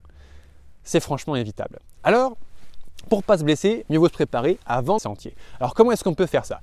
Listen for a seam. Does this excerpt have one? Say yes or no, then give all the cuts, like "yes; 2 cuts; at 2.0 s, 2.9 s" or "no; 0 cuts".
yes; 1 cut; at 5.0 s